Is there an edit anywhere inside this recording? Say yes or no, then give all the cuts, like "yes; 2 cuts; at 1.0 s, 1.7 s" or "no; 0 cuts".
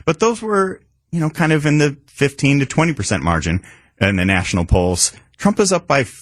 no; 0 cuts